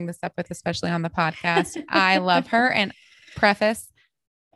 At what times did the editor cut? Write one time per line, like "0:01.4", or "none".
none